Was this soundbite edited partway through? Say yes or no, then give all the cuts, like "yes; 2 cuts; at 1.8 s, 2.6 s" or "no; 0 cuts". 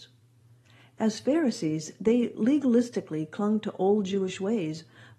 no; 0 cuts